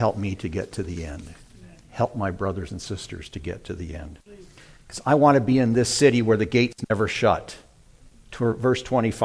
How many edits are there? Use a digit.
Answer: 0